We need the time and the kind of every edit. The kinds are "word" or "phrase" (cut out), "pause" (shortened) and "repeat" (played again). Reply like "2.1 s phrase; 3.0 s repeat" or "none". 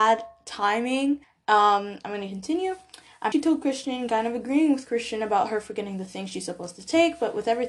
1.2 s pause; 3.3 s phrase

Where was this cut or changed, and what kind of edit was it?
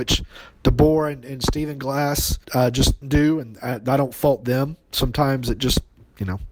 2.4 s pause; 3.0 s word

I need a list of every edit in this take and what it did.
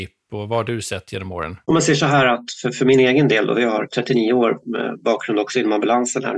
1.6 s pause

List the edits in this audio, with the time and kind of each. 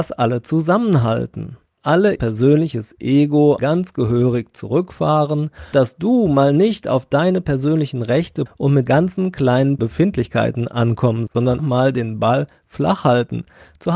1.8 s word; 2.2 s word; 3.6 s word; 5.7 s word; 8.5 s word; 8.9 s word; 9.8 s word; 11.3 s word; 11.6 s word

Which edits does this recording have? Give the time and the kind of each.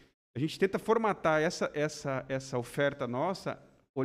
none

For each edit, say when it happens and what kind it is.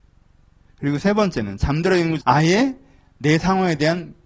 2.2 s word

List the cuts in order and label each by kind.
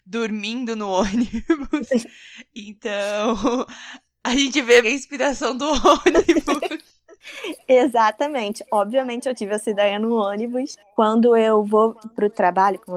4.8 s word

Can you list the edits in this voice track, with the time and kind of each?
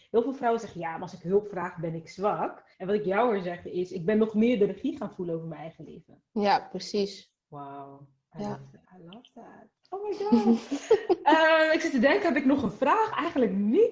2.7 s pause; 7.4 s pause; 8.9 s pause; 9.8 s pause

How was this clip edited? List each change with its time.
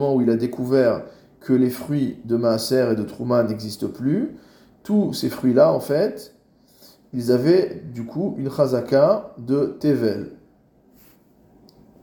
none

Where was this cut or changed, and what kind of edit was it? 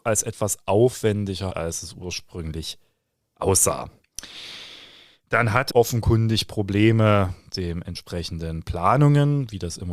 1.5 s word; 5.7 s word; 7.5 s word

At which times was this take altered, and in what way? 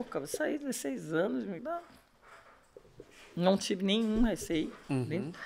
1.6 s word

